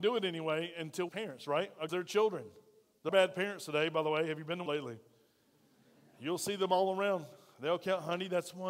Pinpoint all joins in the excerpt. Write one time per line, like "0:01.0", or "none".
0:01.1
0:01.9
0:03.1
0:04.7